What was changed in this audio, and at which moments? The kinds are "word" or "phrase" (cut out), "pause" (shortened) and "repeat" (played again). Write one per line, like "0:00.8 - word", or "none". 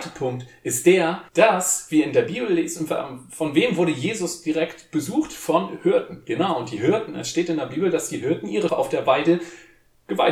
0:01.3 - pause
0:08.7 - word